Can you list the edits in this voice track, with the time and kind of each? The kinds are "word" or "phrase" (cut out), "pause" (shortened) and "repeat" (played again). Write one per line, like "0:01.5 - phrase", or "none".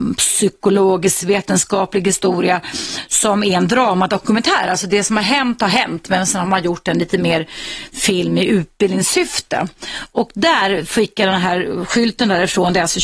none